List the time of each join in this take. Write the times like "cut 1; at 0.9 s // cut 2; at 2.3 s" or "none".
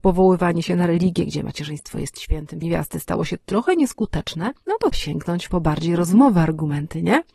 cut 1; at 2.6 s // cut 2; at 4.9 s